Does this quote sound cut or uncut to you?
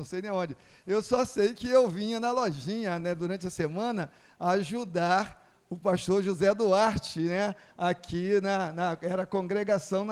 uncut